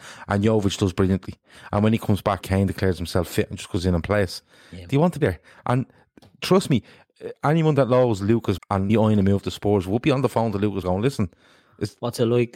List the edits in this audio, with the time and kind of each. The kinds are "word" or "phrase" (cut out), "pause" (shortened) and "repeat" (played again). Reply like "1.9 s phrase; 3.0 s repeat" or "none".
2.4 s word; 5.2 s word; 8.6 s word; 8.9 s word; 10.8 s word